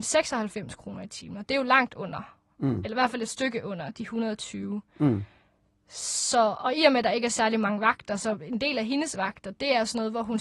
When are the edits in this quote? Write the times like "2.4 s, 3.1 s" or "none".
none